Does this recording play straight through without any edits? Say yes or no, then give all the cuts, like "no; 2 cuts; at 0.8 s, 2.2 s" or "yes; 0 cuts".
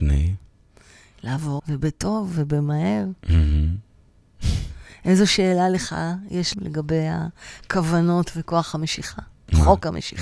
no; 3 cuts; at 1.6 s, 3.2 s, 6.5 s